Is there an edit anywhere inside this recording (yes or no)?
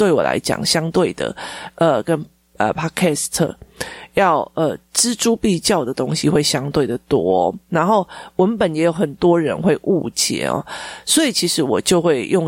no